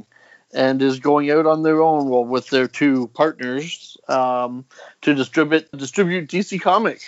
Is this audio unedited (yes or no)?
no